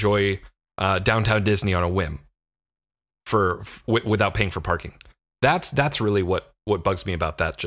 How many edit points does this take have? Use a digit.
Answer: 0